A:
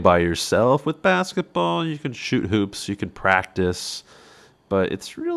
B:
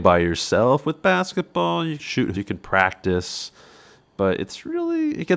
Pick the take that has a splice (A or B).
B